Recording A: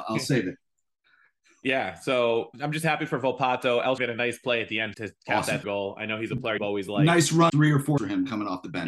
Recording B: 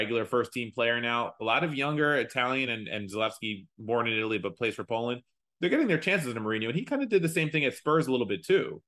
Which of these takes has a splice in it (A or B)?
A